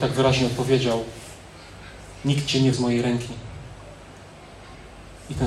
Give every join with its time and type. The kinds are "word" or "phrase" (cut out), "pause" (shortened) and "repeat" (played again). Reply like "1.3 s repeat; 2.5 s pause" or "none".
2.7 s word